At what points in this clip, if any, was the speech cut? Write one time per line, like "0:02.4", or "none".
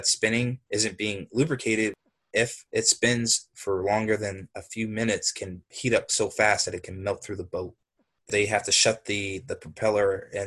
none

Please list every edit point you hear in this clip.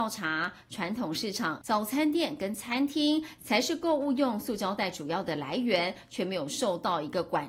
0:01.6

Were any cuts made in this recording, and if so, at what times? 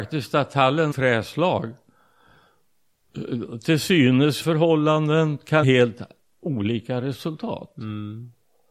0:00.9
0:04.4
0:05.6

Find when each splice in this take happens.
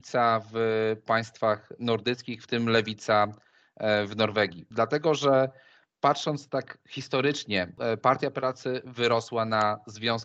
none

